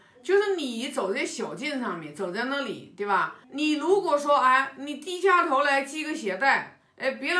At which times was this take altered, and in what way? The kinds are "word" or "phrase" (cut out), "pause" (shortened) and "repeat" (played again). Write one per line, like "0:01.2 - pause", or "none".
0:03.4 - pause